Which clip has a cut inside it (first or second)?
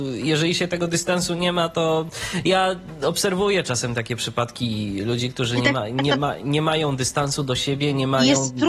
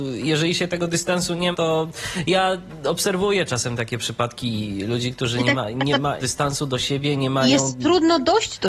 second